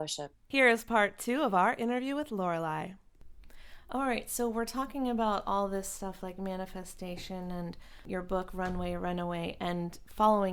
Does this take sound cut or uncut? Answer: uncut